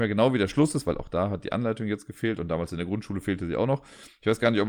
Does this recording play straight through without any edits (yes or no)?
yes